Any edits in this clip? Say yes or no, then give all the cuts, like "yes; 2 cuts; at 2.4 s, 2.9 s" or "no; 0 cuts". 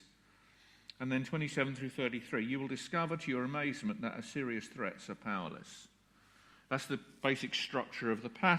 no; 0 cuts